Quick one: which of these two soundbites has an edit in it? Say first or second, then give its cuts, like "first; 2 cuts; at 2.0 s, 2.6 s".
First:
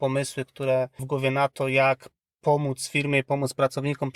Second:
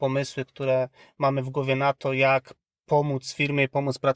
first; 1 cut; at 1.0 s